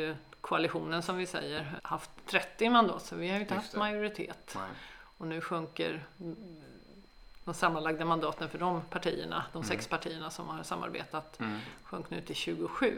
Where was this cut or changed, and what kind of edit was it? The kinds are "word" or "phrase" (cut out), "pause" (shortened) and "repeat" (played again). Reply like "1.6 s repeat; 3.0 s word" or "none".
1.8 s word

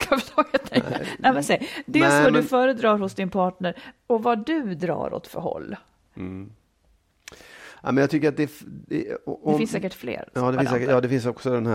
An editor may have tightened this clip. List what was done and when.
4.1 s word

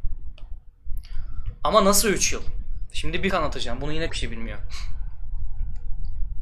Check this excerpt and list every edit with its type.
3.3 s word; 4.1 s word

